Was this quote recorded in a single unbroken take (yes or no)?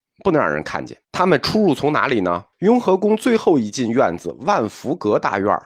no